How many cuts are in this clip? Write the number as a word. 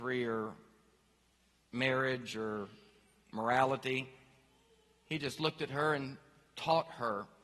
zero